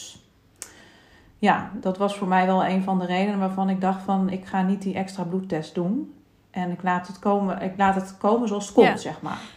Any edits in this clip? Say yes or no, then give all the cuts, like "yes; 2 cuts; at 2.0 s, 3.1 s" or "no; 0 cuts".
no; 0 cuts